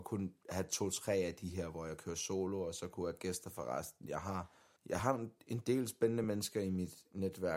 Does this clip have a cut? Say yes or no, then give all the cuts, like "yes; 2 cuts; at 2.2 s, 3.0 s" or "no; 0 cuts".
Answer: no; 0 cuts